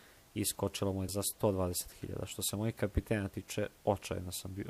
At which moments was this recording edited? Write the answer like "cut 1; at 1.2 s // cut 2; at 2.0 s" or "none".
cut 1; at 1.1 s // cut 2; at 3.8 s